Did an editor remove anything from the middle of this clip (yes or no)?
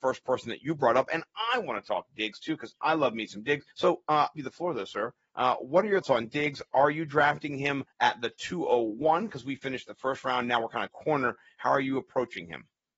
yes